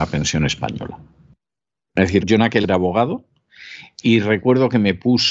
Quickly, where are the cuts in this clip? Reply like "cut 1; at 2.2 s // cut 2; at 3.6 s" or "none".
cut 1; at 2.2 s // cut 2; at 2.6 s